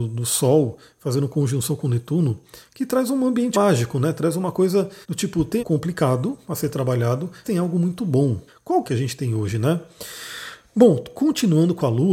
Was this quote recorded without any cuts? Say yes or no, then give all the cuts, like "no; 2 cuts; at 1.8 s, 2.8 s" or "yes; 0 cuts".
no; 6 cuts; at 3.5 s, 5.0 s, 5.6 s, 7.4 s, 8.5 s, 8.9 s